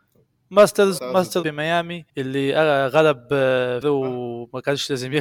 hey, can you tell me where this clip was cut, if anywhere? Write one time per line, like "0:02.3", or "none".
0:01.0
0:01.4
0:02.1
0:03.8